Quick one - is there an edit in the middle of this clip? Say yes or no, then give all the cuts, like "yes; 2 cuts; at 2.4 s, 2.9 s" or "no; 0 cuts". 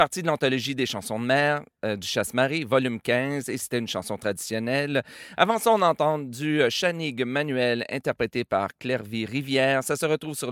no; 0 cuts